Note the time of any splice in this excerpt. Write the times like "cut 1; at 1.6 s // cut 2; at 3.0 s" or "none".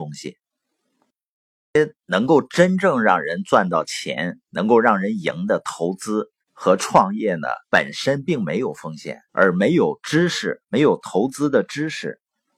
cut 1; at 6.4 s // cut 2; at 7.6 s // cut 3; at 9.3 s